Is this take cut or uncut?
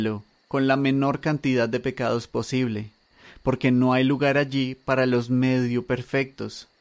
uncut